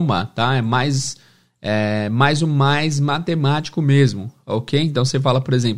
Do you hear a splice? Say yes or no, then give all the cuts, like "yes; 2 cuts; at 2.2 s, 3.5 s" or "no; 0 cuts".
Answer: no; 0 cuts